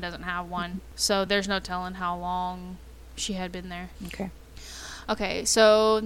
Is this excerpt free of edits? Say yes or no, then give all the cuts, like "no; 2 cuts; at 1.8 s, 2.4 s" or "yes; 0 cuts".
yes; 0 cuts